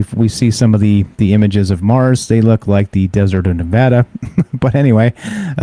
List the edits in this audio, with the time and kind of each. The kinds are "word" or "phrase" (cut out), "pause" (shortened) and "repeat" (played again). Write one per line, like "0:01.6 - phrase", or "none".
none